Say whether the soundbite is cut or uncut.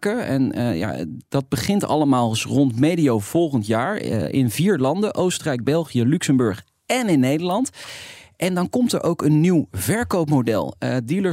uncut